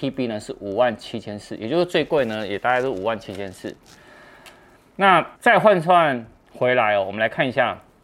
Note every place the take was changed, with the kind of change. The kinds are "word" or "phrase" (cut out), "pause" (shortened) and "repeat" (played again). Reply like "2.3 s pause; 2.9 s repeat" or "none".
5.3 s pause